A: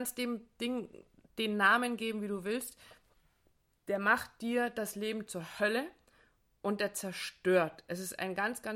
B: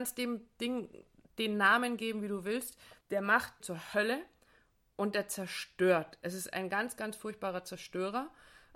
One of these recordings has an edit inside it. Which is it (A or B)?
B